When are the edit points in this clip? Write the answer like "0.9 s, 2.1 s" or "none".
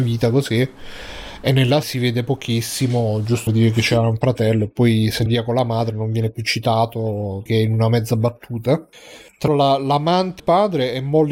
1.8 s, 3.5 s, 5.3 s, 7.5 s, 9.5 s, 10.4 s